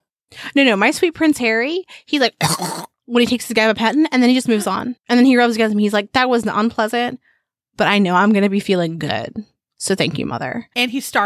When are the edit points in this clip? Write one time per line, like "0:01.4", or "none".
none

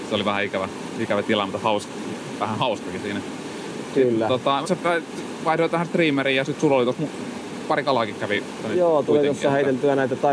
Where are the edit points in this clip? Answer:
0:03.0
0:04.6
0:08.6

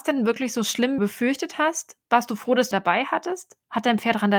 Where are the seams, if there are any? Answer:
0:01.0
0:02.7

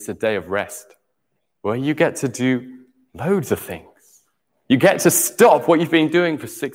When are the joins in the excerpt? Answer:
none

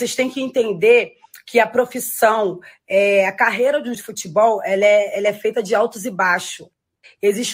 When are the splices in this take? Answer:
0:03.9

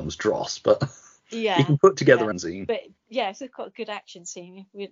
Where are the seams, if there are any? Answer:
0:02.3

